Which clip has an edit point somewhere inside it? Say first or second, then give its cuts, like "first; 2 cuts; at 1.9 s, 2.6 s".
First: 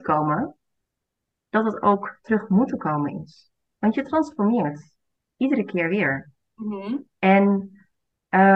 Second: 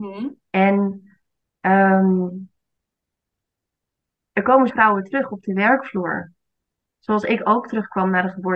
second; 1 cut; at 4.7 s